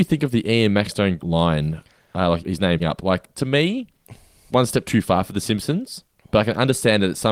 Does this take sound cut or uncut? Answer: cut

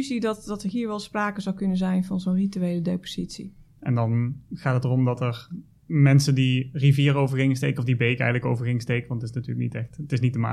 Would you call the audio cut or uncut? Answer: uncut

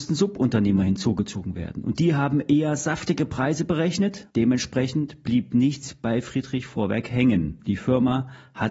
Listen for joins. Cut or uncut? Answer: cut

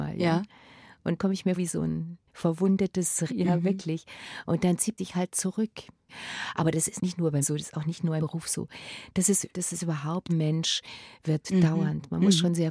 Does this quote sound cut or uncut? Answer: cut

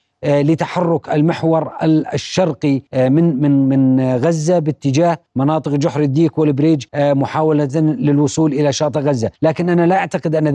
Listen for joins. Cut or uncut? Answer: cut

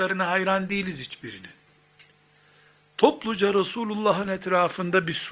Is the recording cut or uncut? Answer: uncut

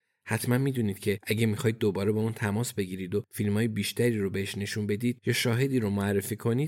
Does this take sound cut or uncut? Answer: uncut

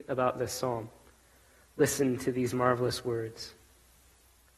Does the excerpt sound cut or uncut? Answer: uncut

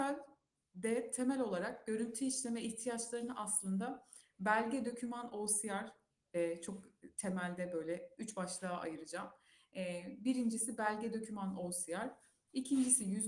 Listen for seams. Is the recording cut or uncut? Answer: uncut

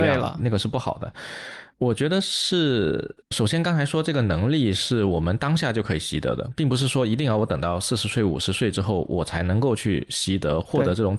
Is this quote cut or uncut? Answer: cut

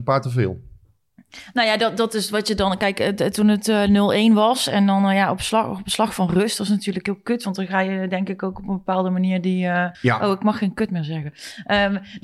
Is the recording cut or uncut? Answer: cut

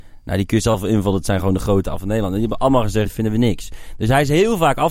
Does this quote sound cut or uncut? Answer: cut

